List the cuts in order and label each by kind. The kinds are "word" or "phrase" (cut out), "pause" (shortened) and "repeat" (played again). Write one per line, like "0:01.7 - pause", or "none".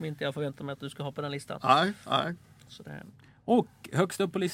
none